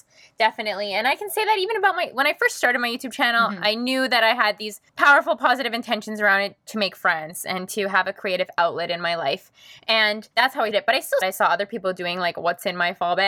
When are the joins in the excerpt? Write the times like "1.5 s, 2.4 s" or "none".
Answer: 4.9 s, 10.3 s, 10.7 s, 11.2 s